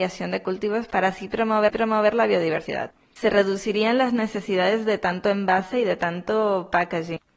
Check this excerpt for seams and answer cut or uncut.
cut